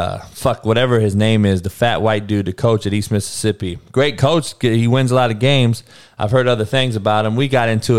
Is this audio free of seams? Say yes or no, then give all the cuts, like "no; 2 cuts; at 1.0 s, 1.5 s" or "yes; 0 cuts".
yes; 0 cuts